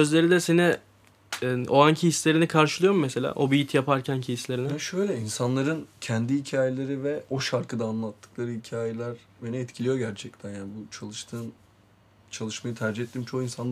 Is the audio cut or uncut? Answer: uncut